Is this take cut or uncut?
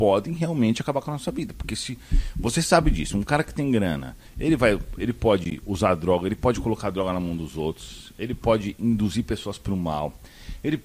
uncut